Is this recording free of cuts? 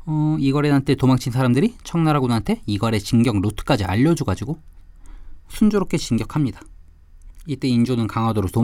yes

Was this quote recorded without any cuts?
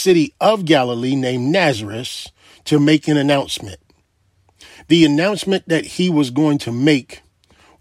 yes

